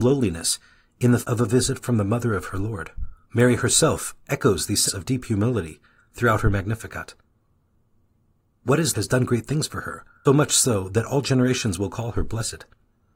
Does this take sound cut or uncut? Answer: cut